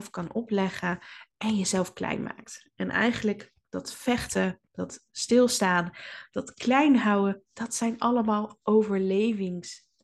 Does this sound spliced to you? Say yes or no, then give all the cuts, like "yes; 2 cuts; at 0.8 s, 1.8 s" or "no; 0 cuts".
no; 0 cuts